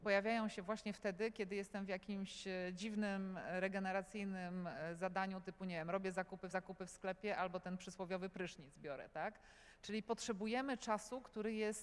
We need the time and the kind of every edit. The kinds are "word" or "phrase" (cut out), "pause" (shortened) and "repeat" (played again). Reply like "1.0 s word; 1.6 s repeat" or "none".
6.5 s repeat